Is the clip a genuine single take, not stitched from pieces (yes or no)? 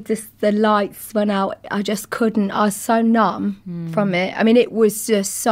yes